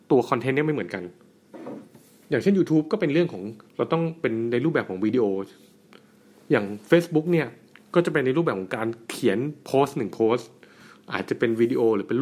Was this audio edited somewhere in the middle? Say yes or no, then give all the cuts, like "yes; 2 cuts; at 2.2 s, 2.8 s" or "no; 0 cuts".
no; 0 cuts